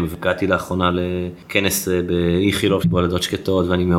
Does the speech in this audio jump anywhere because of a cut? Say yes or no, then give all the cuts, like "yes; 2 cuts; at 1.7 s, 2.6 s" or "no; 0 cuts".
yes; 1 cut; at 2.8 s